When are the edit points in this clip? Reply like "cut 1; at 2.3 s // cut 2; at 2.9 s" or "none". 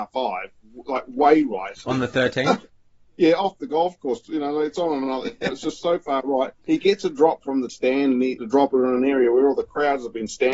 cut 1; at 2.7 s // cut 2; at 5.5 s // cut 3; at 6.6 s // cut 4; at 7.7 s // cut 5; at 8.4 s